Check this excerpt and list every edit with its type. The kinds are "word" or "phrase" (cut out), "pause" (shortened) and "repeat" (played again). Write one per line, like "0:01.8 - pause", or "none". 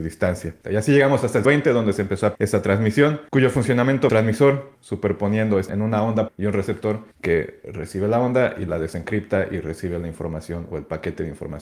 0:01.4 - word
0:02.3 - word
0:03.3 - pause
0:04.1 - phrase
0:04.7 - phrase
0:05.7 - word
0:06.3 - word
0:07.1 - pause